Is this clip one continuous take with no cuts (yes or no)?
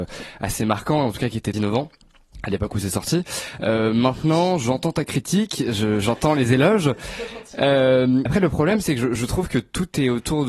no